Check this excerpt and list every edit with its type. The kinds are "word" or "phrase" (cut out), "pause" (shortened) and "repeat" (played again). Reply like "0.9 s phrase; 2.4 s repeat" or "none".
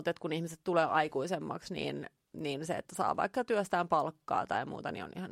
none